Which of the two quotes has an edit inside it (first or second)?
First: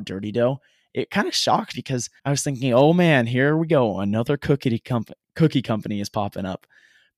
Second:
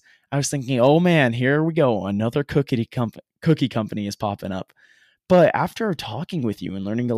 first